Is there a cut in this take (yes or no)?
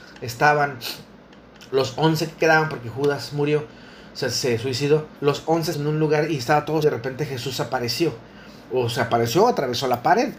yes